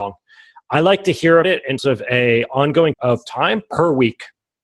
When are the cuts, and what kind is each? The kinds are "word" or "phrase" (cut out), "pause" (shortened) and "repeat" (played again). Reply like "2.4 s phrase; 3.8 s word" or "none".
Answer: 1.4 s word; 1.8 s word; 2.9 s word